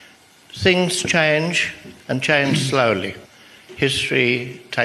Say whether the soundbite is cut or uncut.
cut